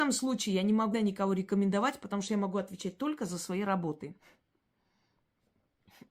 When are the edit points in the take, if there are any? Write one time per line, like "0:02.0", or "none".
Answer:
0:00.9